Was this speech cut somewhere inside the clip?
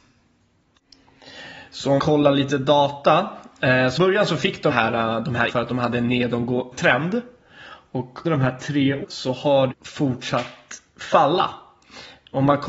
yes; 8 cuts; at 2.0 s, 4.0 s, 4.7 s, 5.5 s, 6.7 s, 8.2 s, 9.0 s, 9.7 s

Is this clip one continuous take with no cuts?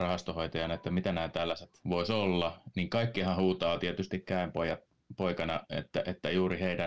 yes; 0 cuts

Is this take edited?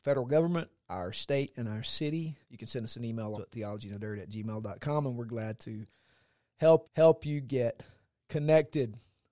yes; 3 cuts; at 2.4 s, 3.3 s, 6.8 s

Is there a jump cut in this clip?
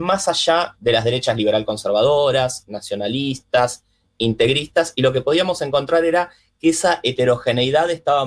no; 0 cuts

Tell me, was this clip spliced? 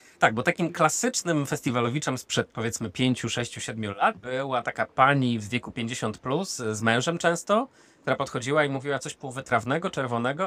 no; 0 cuts

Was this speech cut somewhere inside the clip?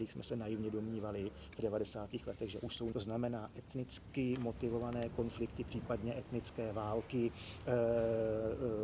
yes; 1 cut; at 2.9 s

